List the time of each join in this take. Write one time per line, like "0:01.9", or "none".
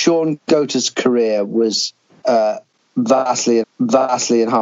0:02.0
0:03.6